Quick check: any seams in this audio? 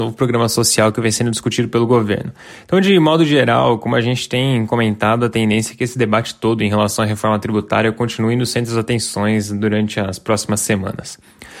no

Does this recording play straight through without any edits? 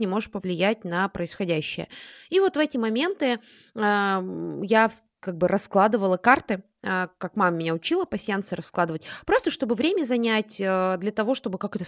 yes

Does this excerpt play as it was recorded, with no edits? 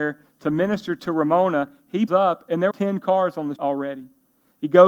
no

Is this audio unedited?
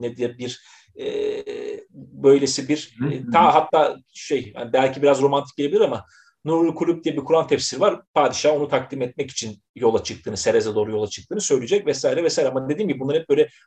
no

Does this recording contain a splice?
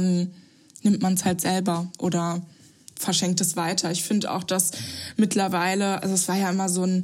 no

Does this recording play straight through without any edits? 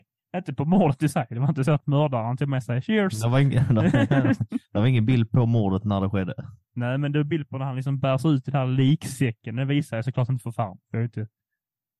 yes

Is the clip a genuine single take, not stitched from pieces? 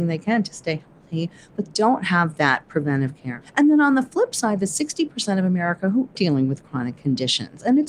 no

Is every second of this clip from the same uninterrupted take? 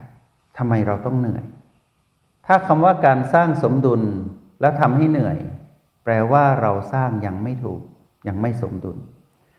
yes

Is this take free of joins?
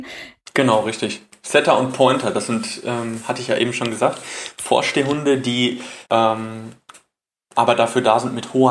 no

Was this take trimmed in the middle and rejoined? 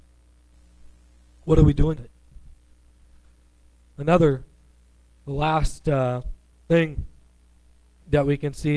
yes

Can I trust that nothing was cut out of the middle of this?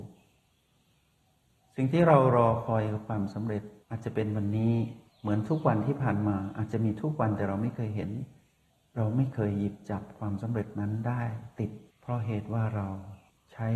no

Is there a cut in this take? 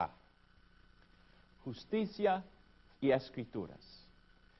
yes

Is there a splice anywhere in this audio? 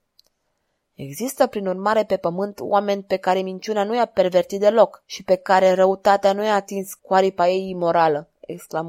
no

